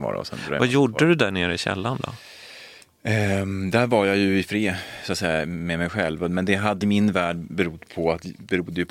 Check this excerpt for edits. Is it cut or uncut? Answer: cut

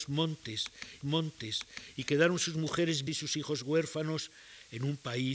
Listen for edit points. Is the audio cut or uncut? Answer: cut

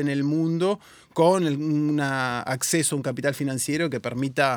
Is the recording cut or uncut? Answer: uncut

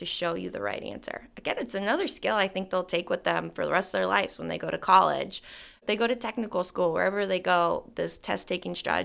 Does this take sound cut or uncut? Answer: uncut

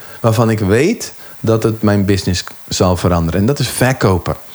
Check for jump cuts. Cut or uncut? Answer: uncut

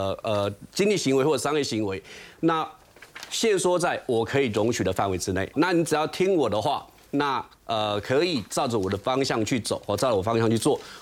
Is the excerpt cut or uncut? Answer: cut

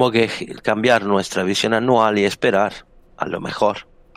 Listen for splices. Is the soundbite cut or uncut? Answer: uncut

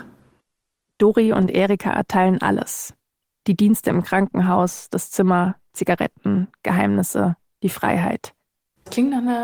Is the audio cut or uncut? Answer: uncut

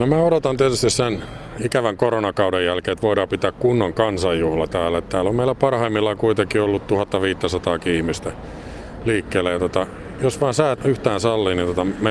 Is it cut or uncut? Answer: cut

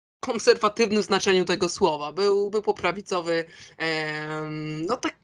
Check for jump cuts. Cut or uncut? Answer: cut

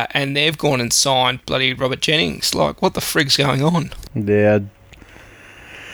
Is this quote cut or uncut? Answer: uncut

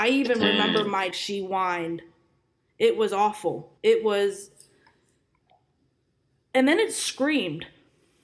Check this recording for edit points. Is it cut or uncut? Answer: cut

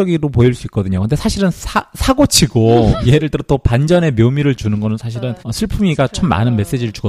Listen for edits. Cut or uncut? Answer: cut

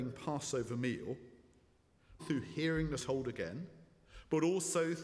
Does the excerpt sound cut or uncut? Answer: cut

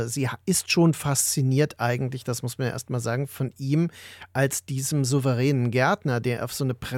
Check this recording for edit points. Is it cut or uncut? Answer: uncut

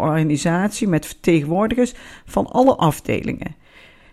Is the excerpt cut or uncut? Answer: uncut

